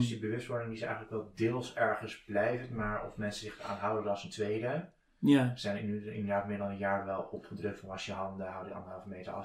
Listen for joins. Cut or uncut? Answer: uncut